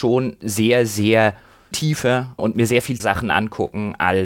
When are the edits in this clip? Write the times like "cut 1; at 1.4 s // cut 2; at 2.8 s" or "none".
cut 1; at 1.7 s // cut 2; at 2.4 s // cut 3; at 3.0 s